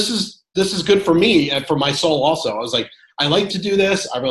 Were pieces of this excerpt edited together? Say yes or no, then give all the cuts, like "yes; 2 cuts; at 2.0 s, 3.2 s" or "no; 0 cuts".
no; 0 cuts